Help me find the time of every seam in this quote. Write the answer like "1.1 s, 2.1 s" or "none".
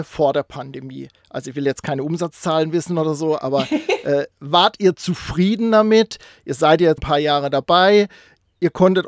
7.0 s